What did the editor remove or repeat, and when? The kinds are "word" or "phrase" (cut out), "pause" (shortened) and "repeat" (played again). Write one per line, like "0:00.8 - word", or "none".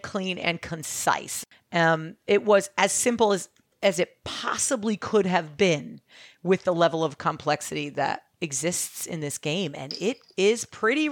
none